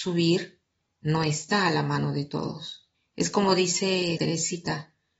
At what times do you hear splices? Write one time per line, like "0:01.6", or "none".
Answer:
0:02.9
0:04.2